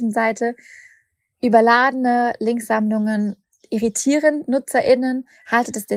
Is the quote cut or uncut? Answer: uncut